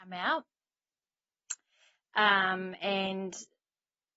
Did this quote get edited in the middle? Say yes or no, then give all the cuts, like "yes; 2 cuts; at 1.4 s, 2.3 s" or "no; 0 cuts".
no; 0 cuts